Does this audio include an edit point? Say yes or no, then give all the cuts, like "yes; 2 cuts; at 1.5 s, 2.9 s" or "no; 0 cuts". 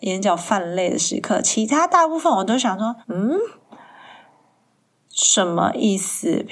yes; 1 cut; at 3.0 s